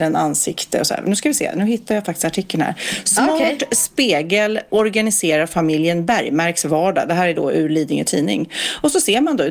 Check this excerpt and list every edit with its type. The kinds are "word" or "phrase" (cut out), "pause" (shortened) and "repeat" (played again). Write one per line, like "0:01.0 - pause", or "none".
none